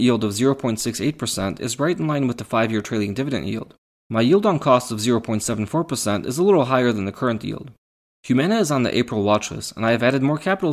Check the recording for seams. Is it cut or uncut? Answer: uncut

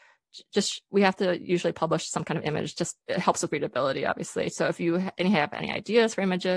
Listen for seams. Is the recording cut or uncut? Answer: cut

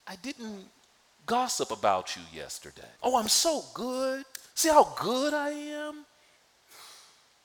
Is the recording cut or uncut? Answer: cut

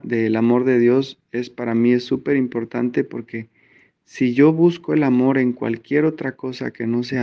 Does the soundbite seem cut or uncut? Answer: uncut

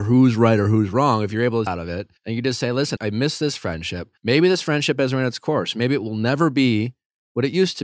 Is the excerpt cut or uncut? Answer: cut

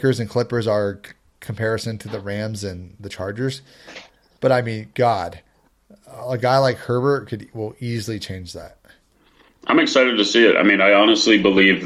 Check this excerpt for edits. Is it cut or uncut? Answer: uncut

